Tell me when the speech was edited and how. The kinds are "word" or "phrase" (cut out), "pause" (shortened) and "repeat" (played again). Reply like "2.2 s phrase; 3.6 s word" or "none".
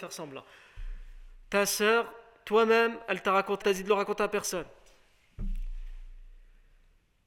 3.6 s word